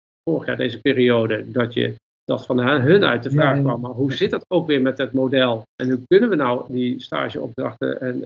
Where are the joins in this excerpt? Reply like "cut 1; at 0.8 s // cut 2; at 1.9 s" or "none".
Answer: cut 1; at 5.7 s